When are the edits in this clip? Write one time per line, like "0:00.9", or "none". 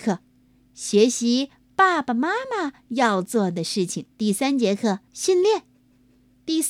0:04.1
0:05.1